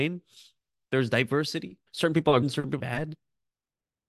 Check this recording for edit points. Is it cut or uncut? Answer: cut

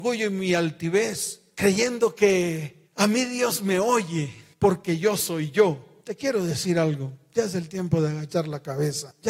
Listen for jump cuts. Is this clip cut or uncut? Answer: uncut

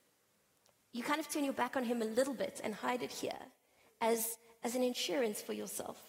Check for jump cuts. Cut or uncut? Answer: uncut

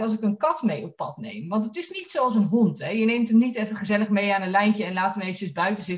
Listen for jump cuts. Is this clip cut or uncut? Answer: uncut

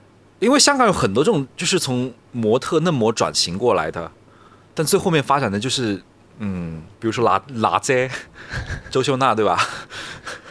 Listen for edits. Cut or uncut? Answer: uncut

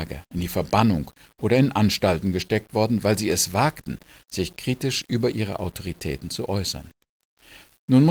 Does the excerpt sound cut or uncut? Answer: uncut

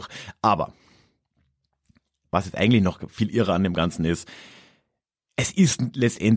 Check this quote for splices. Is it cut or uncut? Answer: uncut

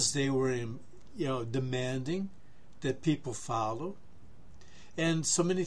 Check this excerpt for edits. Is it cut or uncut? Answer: uncut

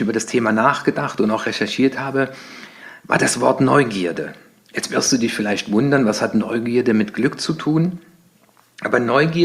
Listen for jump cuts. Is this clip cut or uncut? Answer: uncut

